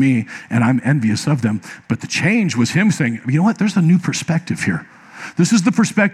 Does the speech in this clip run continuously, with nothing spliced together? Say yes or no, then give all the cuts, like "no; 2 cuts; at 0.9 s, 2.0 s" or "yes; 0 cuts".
yes; 0 cuts